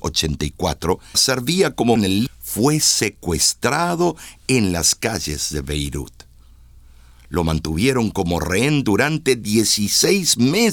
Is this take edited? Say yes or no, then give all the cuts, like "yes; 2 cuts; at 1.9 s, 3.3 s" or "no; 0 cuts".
yes; 3 cuts; at 1.1 s, 2.0 s, 2.3 s